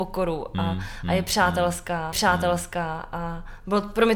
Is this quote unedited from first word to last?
no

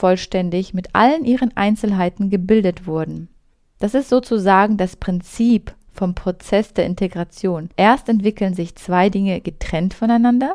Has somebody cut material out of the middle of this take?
yes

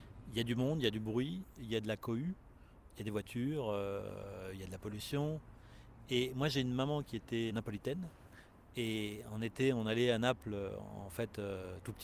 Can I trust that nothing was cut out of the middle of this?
no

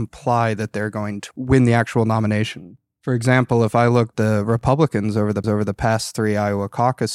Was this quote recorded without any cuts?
no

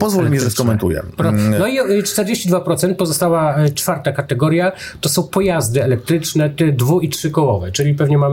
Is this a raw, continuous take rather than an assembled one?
yes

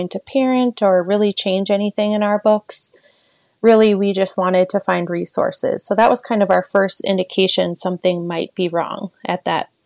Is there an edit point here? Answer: no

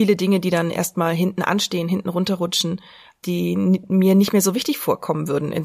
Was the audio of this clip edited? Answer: no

